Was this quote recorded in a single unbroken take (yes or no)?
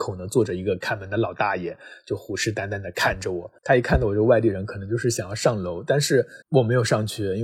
no